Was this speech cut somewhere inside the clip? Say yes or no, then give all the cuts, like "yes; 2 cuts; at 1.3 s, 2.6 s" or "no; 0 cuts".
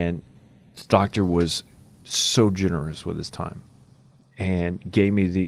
no; 0 cuts